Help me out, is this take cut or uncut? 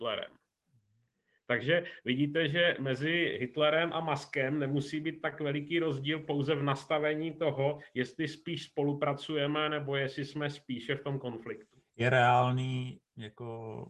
uncut